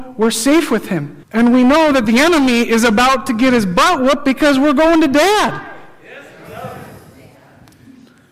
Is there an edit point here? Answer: yes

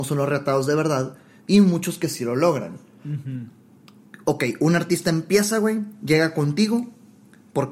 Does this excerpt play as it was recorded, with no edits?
yes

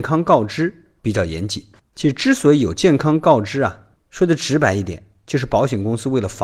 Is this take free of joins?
no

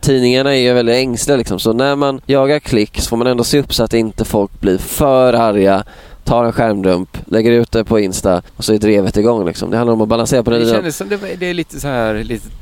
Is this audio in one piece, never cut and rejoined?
no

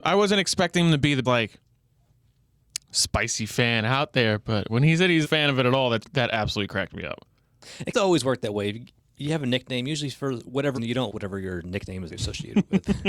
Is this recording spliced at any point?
yes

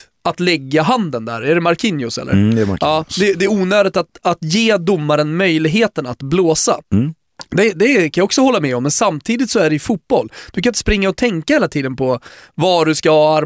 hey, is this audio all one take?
yes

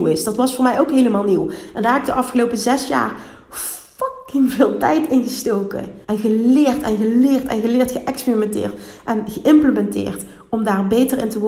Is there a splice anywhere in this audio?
yes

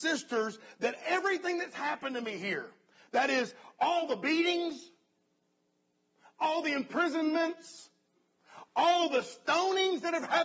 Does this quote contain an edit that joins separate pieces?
no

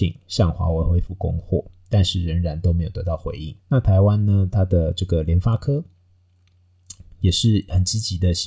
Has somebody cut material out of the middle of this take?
yes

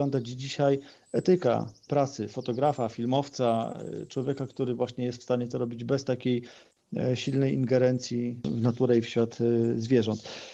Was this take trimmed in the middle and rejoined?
no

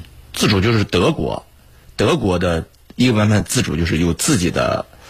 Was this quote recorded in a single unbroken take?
yes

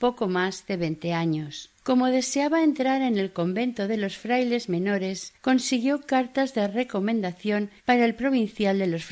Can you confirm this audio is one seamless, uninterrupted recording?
no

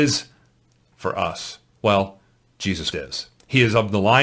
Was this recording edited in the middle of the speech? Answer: yes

